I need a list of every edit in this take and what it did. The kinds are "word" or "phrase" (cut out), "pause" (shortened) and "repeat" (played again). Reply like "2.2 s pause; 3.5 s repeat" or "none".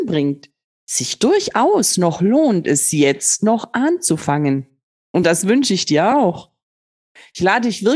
none